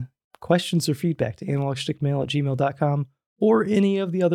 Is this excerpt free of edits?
yes; 0 cuts

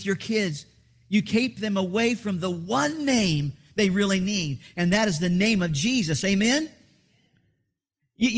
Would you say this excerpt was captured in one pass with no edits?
yes; 0 cuts

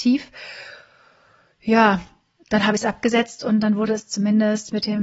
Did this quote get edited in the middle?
no; 0 cuts

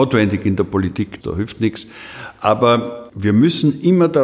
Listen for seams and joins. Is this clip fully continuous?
no; 1 cut; at 1.2 s

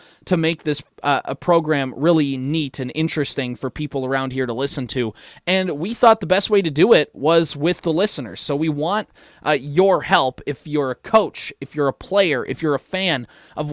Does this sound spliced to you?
no; 0 cuts

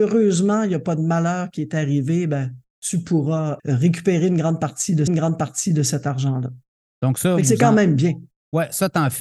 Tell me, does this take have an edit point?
yes; 2 cuts; at 3.6 s, 5.1 s

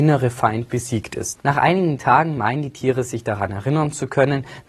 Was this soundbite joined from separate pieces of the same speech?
no; 0 cuts

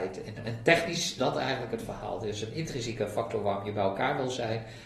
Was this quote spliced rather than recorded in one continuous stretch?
yes; 1 cut; at 1.2 s

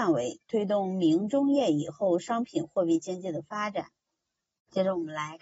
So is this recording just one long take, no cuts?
yes; 0 cuts

